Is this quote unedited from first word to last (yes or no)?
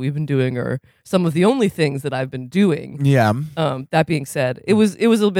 yes